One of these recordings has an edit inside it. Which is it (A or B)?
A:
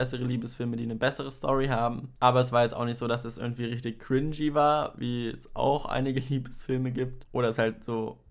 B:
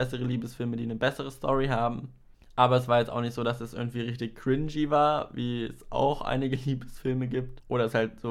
A